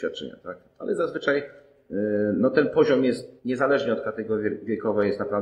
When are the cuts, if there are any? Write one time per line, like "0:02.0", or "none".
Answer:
0:03.4

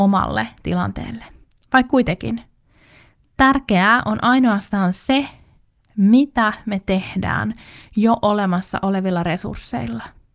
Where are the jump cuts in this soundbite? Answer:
none

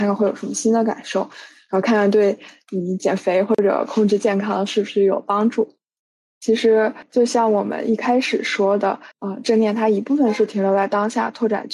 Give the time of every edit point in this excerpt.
0:06.0
0:09.1

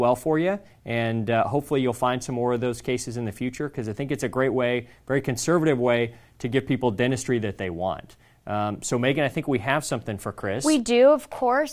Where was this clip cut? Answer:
none

